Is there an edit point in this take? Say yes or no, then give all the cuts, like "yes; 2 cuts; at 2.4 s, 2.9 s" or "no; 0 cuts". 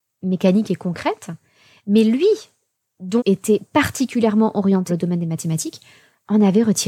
yes; 2 cuts; at 3.2 s, 4.9 s